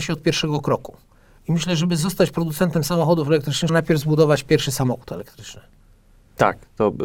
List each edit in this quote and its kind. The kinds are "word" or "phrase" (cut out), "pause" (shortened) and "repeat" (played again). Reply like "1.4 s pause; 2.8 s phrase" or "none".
3.7 s word